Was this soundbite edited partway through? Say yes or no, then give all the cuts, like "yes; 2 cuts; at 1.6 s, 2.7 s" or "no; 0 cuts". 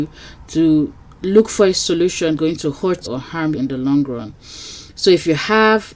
yes; 3 cuts; at 2.4 s, 3.0 s, 3.5 s